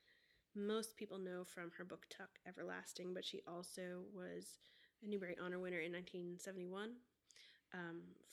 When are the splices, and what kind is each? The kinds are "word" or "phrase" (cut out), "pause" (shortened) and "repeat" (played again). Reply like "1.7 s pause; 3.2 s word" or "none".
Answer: none